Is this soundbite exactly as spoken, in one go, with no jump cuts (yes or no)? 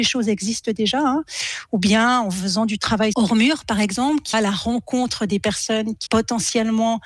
no